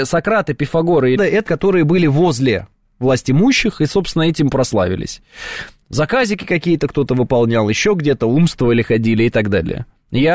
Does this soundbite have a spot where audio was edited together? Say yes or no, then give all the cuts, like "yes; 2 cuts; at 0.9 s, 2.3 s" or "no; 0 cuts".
yes; 2 cuts; at 1.2 s, 1.5 s